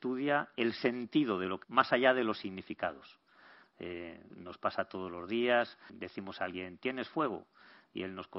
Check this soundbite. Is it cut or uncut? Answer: cut